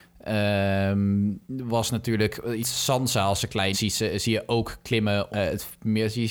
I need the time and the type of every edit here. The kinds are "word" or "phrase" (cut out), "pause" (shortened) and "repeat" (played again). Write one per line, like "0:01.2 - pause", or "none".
0:01.4 - pause
0:02.6 - word
0:03.7 - word
0:05.3 - word